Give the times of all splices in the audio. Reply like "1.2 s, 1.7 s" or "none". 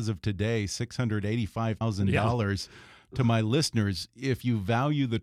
1.8 s